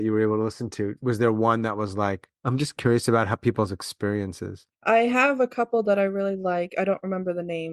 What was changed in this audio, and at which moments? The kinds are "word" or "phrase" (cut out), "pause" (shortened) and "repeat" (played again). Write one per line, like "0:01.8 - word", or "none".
0:02.3 - pause
0:04.7 - pause